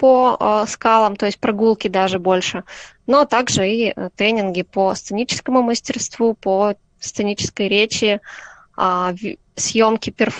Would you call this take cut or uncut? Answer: uncut